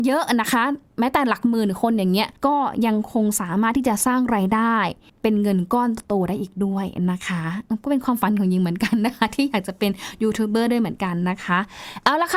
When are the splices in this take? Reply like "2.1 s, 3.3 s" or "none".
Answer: 2.4 s, 5.1 s